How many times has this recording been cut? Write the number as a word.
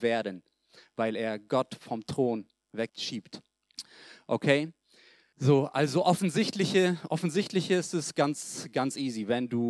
zero